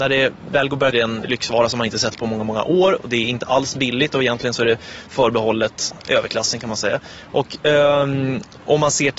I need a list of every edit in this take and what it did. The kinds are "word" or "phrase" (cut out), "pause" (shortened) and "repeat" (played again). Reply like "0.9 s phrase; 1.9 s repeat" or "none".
0.9 s phrase; 7.6 s pause